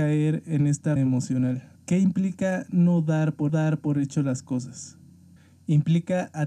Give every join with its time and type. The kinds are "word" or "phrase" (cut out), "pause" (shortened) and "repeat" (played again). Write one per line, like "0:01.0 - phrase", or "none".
0:01.0 - word
0:01.8 - pause
0:03.5 - repeat
0:05.4 - pause